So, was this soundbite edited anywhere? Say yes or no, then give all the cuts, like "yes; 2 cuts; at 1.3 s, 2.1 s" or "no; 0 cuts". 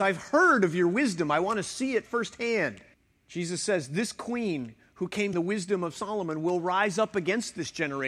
yes; 2 cuts; at 2.9 s, 5.3 s